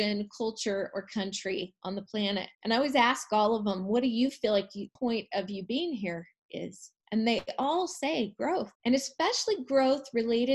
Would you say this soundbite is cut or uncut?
cut